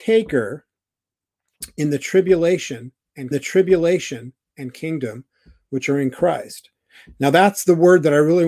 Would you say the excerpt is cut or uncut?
cut